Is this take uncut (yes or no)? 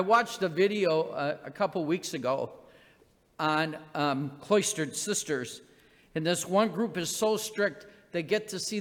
yes